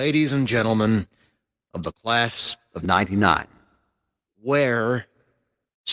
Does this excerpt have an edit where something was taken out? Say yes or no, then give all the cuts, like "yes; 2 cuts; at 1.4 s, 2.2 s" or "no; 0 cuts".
no; 0 cuts